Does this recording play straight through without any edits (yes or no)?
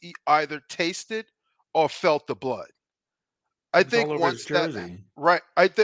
yes